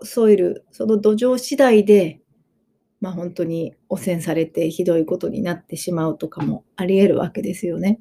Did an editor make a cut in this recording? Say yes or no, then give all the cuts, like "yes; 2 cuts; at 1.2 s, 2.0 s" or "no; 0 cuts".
no; 0 cuts